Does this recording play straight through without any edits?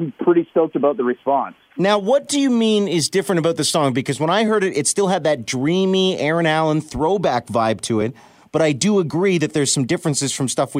yes; 0 cuts

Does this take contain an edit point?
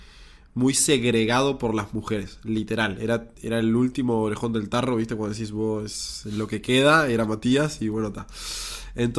no; 0 cuts

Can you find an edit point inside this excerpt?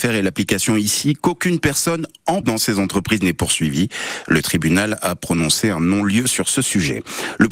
yes; 1 cut; at 2.4 s

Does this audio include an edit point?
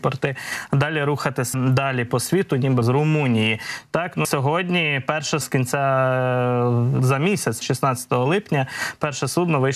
yes; 6 cuts; at 1.5 s, 2.8 s, 4.2 s, 5.4 s, 7.0 s, 7.6 s

